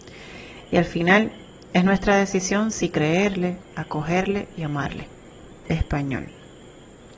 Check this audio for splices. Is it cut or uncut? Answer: uncut